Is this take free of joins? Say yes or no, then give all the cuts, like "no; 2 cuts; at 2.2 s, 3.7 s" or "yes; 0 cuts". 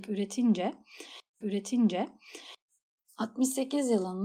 no; 1 cut; at 1.4 s